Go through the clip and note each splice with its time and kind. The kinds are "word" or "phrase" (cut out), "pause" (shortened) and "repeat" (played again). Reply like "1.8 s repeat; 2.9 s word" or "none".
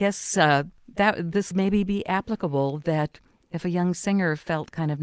1.5 s phrase